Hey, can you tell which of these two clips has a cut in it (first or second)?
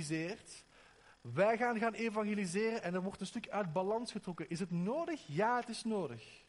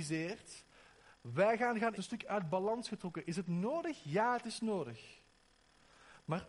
second